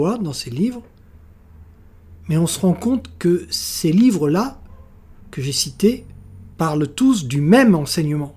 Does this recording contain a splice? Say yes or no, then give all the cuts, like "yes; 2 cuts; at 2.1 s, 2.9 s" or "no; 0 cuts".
yes; 2 cuts; at 5.2 s, 6.5 s